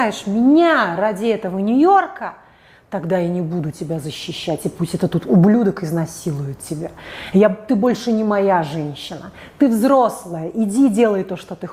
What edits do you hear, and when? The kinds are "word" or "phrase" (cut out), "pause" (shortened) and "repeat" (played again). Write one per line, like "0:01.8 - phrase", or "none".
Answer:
none

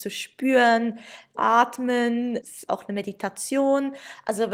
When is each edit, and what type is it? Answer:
0:01.3 - word
0:02.7 - word

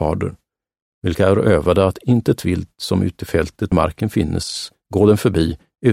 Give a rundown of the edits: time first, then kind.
0:03.7 - word
0:04.8 - pause

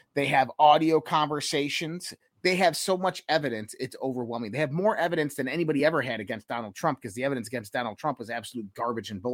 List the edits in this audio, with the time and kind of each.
none

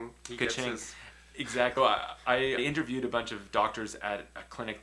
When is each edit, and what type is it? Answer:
0:01.8 - word
0:02.6 - word

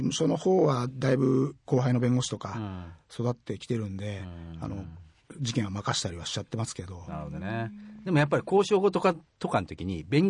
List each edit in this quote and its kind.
0:01.6 - pause

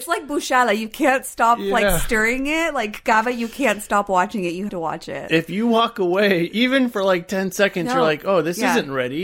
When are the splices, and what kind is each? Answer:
0:04.7 - word

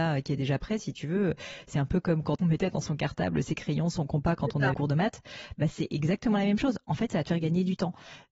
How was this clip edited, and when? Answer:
0:02.4 - word
0:04.7 - word

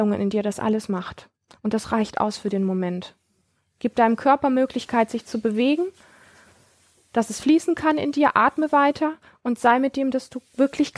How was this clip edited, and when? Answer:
none

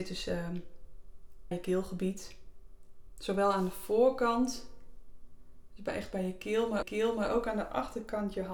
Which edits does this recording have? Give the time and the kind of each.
0:01.5 - word
0:06.8 - repeat

